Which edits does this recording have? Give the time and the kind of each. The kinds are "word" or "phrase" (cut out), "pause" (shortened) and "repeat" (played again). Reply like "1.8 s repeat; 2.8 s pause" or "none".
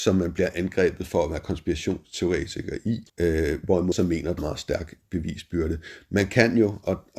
3.1 s pause; 3.9 s word; 4.4 s phrase